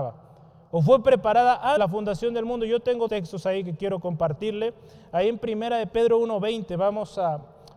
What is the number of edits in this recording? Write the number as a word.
two